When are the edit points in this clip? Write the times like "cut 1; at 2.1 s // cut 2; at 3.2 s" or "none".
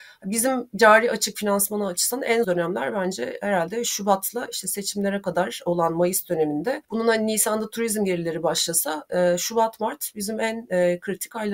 cut 1; at 2.4 s // cut 2; at 6.8 s